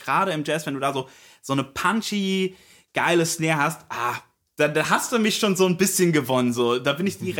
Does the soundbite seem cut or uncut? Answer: uncut